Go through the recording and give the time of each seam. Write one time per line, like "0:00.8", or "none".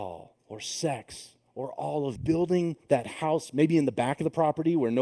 0:02.2